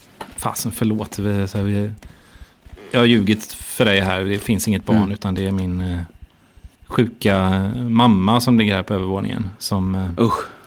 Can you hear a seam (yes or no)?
yes